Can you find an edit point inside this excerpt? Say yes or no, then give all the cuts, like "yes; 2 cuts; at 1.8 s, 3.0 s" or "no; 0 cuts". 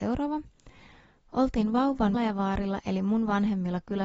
yes; 1 cut; at 2.1 s